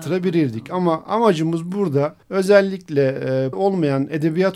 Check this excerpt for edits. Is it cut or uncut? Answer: cut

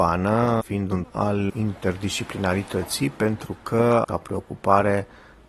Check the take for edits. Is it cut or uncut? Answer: cut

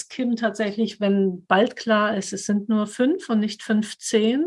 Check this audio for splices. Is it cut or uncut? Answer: uncut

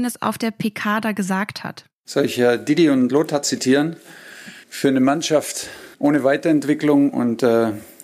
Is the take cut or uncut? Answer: cut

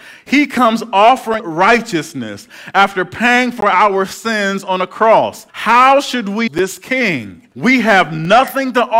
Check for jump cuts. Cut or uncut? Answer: cut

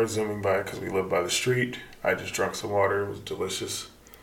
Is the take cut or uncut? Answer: uncut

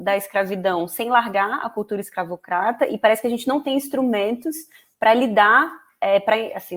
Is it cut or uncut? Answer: uncut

